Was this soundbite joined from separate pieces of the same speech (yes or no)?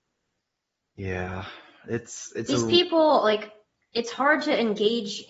no